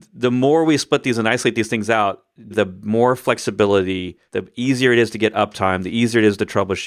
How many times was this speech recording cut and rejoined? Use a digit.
2